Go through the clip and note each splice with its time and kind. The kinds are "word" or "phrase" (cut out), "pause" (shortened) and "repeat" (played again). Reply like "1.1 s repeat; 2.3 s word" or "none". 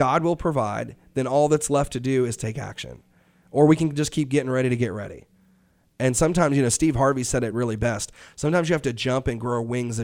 none